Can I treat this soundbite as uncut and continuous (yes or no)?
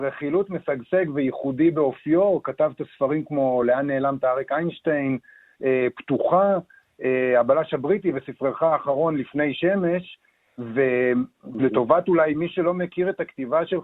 yes